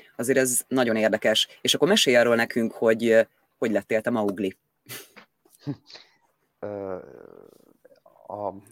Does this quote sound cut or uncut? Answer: uncut